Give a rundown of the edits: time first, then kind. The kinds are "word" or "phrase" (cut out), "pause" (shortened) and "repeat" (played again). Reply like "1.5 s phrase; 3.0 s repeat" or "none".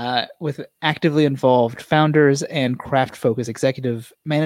none